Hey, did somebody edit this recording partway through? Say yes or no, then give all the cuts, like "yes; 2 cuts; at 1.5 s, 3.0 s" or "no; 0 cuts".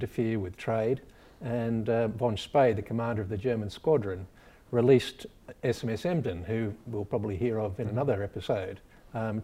no; 0 cuts